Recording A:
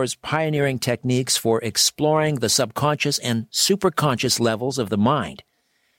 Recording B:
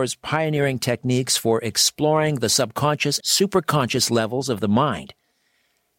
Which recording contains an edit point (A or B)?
B